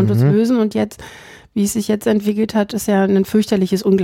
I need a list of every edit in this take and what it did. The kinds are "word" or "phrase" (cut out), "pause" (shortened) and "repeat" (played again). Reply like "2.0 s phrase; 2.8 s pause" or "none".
none